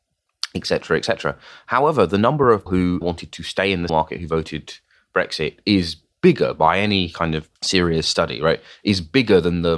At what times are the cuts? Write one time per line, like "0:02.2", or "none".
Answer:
0:02.7
0:03.0
0:03.9